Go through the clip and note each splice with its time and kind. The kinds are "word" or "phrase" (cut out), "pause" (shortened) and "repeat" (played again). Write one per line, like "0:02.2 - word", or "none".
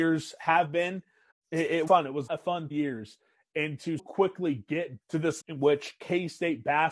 0:01.3 - word
0:01.9 - word
0:02.3 - word
0:02.7 - word
0:04.0 - word
0:05.0 - word
0:05.4 - word